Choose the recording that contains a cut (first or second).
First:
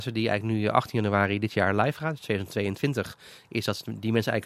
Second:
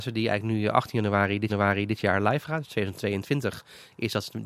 second